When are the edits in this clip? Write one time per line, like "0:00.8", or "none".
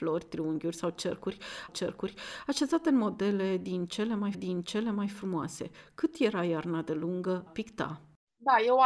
0:01.7
0:04.3
0:07.5